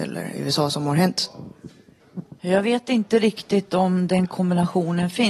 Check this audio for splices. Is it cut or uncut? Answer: cut